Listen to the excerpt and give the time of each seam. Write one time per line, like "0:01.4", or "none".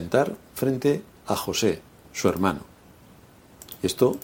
0:02.0